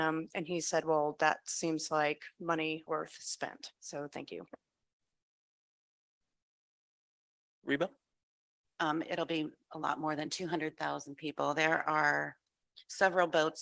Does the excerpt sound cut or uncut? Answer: cut